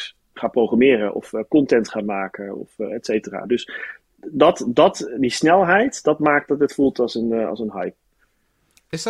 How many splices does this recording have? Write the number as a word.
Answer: zero